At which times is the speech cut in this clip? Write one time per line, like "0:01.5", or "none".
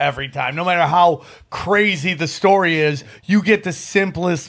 none

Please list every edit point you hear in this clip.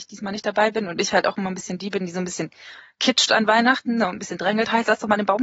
none

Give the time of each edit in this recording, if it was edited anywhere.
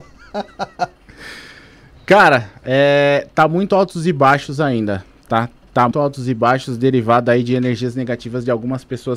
0:05.9

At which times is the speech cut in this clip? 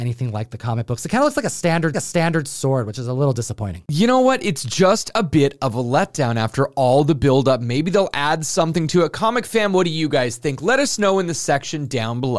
0:01.9

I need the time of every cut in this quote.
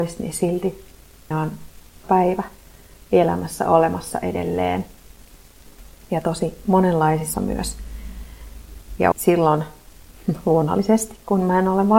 0:01.3
0:02.0
0:07.3
0:09.1

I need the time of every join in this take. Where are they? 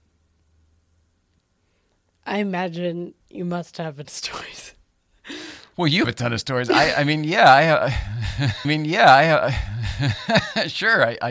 0:03.2
0:04.0
0:06.0
0:08.6

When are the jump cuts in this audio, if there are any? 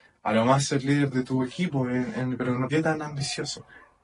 0:01.1
0:02.7

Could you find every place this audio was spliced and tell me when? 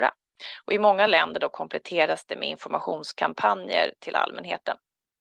none

